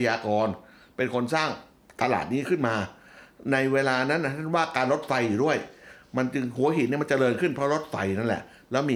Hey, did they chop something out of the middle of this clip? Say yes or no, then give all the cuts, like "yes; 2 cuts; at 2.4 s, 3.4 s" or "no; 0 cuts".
no; 0 cuts